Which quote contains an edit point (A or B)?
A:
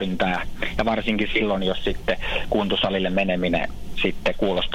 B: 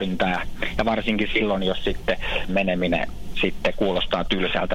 B